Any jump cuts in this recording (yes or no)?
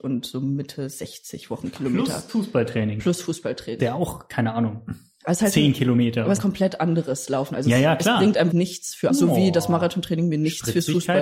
yes